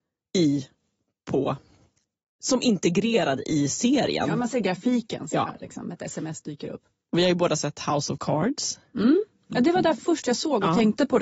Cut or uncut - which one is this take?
uncut